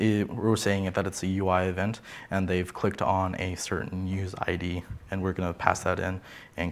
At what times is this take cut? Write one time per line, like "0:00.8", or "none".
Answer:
none